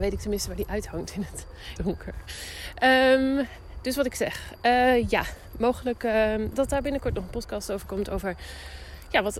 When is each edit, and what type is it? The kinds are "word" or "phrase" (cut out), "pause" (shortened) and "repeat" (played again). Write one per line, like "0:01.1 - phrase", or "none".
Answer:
0:01.8 - phrase
0:06.5 - word